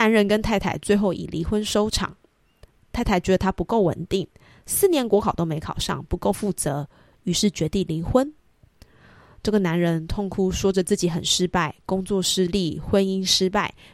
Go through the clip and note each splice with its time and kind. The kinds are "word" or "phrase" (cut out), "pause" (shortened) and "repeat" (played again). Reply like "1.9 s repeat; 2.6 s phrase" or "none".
none